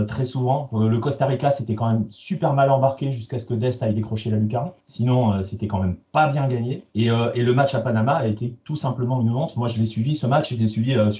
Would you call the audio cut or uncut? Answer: cut